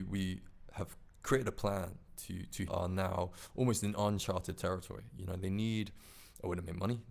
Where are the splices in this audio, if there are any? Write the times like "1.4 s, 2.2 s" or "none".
2.7 s